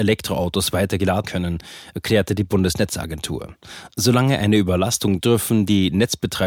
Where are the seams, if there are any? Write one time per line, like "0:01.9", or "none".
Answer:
0:01.3
0:05.2